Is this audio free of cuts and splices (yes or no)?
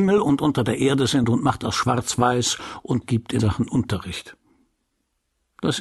no